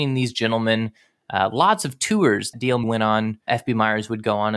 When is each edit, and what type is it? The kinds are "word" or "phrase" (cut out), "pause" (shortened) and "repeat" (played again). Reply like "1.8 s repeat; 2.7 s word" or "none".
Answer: 2.5 s word; 2.8 s word; 3.5 s word